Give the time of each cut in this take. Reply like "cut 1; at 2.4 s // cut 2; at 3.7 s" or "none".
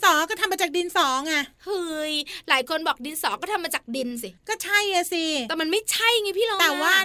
cut 1; at 4.4 s